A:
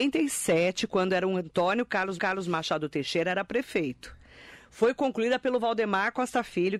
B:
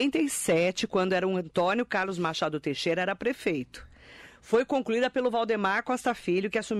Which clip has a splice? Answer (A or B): A